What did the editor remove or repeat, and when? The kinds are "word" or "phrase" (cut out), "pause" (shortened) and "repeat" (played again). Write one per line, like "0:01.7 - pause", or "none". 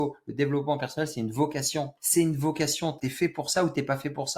0:02.0 - pause
0:03.0 - word